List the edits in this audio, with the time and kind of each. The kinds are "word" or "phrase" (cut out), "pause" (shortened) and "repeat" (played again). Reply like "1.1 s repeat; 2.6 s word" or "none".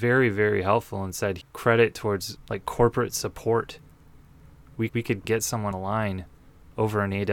1.4 s word; 2.4 s word; 4.9 s word; 5.2 s word; 5.7 s word